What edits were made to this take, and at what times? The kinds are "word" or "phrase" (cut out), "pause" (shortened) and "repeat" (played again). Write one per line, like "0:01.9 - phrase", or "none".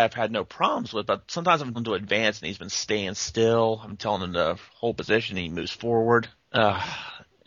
0:01.7 - word